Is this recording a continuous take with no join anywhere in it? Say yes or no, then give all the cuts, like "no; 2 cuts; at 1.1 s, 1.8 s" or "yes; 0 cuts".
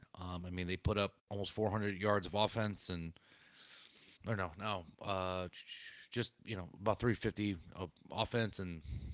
no; 2 cuts; at 1.2 s, 4.2 s